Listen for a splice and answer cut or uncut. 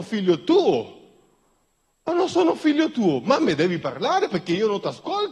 uncut